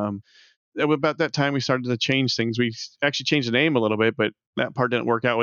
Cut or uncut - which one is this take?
uncut